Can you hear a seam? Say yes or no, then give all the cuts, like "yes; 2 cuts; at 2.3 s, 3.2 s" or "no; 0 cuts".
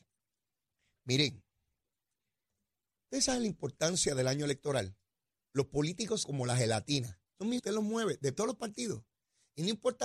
yes; 5 cuts; at 5.1 s, 6.2 s, 7.3 s, 7.6 s, 8.3 s